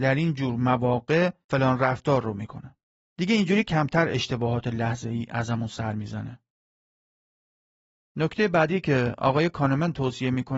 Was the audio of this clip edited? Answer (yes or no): no